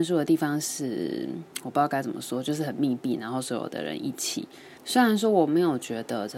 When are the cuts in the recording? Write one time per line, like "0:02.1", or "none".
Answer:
0:04.8